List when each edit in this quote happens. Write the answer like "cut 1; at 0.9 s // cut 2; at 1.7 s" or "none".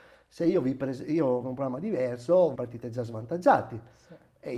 cut 1; at 1.4 s // cut 2; at 2.6 s